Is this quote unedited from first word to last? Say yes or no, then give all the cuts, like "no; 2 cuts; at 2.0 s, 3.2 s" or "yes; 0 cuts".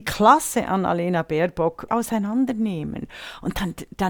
no; 1 cut; at 1.9 s